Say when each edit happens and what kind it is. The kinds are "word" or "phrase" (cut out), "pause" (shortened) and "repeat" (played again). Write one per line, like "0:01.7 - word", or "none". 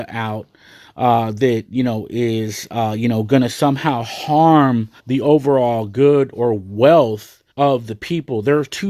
0:05.0 - pause
0:07.5 - pause